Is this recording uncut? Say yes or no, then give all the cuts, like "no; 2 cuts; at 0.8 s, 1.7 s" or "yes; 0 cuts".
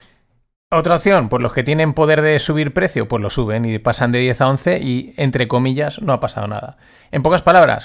yes; 0 cuts